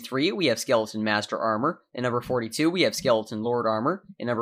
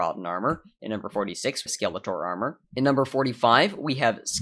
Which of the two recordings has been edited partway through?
second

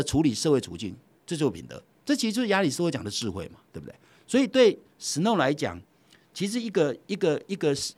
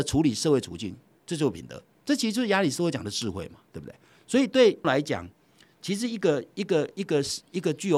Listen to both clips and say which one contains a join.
second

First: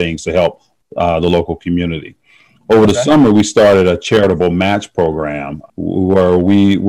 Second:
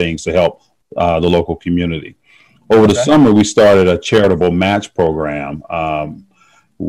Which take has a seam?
first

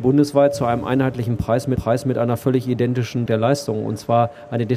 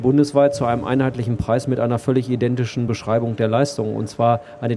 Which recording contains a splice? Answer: first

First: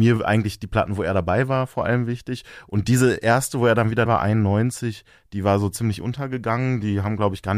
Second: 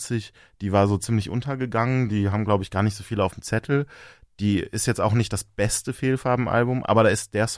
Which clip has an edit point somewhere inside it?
first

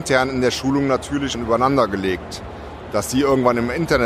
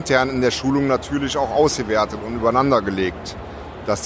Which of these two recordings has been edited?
first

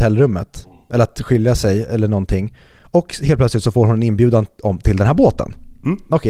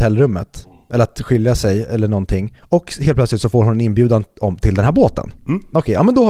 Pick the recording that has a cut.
second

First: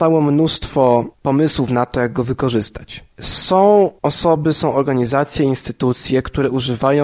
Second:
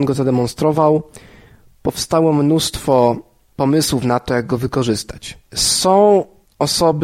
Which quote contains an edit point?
first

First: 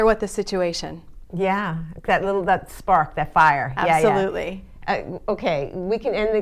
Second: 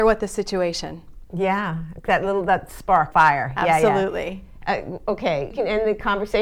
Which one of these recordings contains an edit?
second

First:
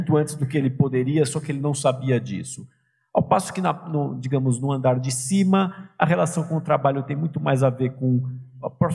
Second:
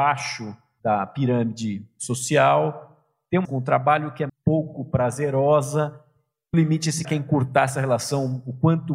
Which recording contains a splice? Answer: second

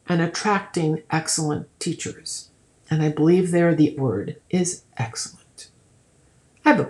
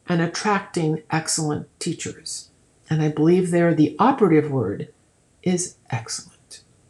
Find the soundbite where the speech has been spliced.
first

